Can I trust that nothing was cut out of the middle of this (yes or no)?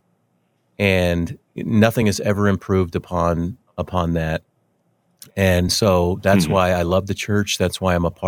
yes